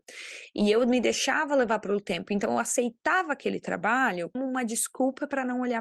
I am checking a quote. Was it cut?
yes; 1 cut; at 4.3 s

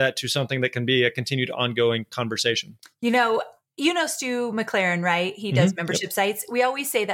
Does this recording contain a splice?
no; 0 cuts

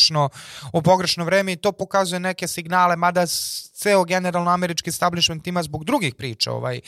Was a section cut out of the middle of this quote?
no; 0 cuts

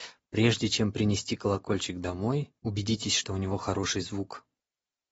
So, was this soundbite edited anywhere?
yes; 1 cut; at 2.6 s

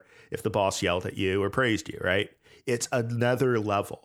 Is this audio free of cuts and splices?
yes; 0 cuts

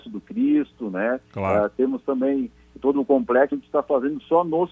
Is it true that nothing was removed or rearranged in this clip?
no; 1 cut; at 3.5 s

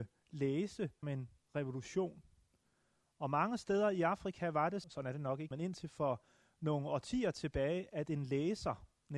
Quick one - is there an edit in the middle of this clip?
yes; 3 cuts; at 1.0 s, 4.8 s, 5.5 s

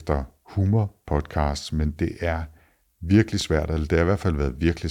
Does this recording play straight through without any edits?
yes; 0 cuts

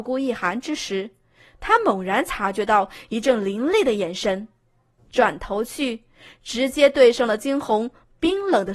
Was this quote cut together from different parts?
no; 0 cuts

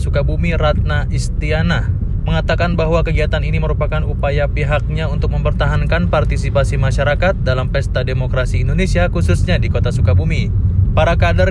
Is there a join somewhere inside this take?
no; 0 cuts

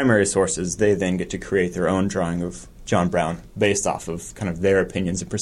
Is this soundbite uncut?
yes; 0 cuts

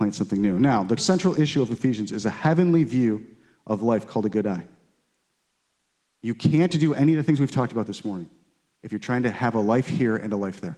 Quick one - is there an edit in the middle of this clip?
yes; 1 cut; at 1.0 s

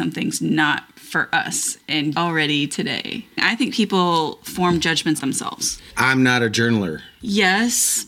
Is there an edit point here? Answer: yes; 3 cuts; at 2.1 s, 3.3 s, 5.2 s

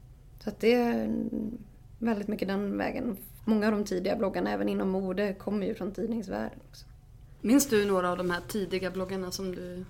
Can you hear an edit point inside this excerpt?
no; 0 cuts

